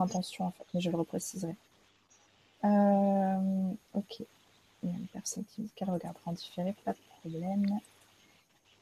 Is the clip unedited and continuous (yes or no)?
yes